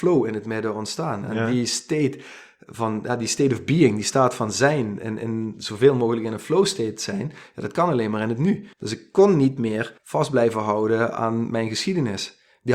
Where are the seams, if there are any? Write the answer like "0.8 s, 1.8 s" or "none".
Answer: 8.7 s, 10.0 s